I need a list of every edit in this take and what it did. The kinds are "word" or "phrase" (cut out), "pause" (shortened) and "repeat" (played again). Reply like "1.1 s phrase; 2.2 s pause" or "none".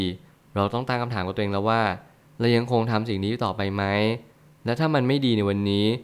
none